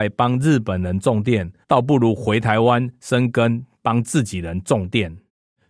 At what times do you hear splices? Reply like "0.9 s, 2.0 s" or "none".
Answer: 1.6 s